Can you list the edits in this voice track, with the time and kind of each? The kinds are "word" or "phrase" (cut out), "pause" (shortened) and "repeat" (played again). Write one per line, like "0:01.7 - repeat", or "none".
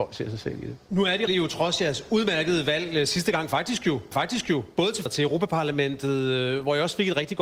0:01.3 - word
0:04.1 - repeat
0:05.1 - word